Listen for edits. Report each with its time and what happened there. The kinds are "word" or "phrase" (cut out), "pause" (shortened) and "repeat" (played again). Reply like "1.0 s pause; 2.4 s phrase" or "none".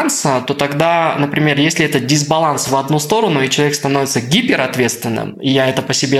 none

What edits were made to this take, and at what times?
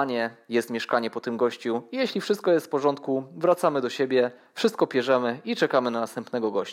none

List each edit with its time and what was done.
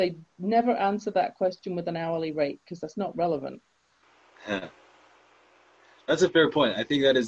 none

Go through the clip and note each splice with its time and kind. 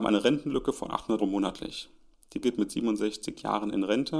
1.2 s word; 2.4 s word

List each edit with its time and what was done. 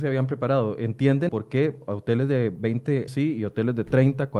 1.3 s word; 3.1 s word

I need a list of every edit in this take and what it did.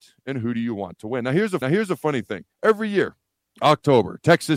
1.6 s repeat; 2.5 s pause; 3.4 s pause

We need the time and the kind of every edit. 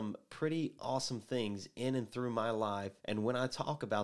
3.0 s pause

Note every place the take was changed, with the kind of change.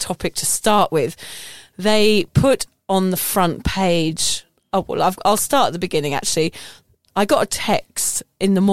none

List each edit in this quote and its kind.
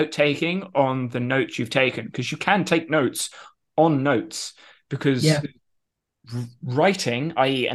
none

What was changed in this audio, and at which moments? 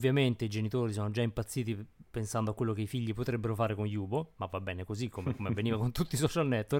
none

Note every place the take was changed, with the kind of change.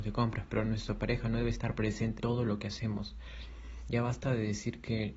2.2 s word

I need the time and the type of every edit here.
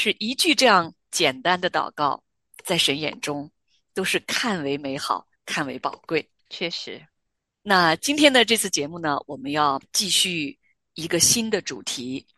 5.4 s pause; 6.4 s pause

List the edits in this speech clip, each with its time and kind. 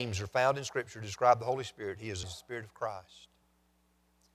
2.2 s phrase

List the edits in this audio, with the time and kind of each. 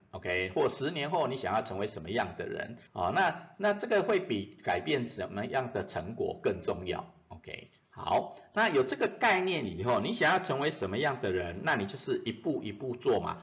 2.9 s pause

